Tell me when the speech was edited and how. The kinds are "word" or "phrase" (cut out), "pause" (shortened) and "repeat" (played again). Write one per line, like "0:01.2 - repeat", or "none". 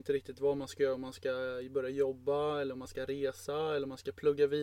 none